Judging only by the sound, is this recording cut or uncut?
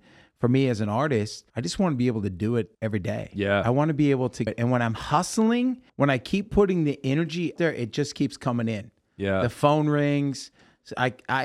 cut